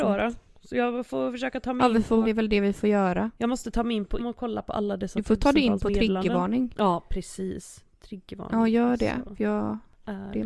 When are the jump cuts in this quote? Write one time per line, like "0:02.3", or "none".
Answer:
0:02.2
0:03.4
0:04.2